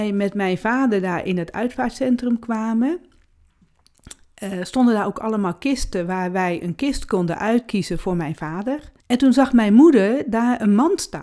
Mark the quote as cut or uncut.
cut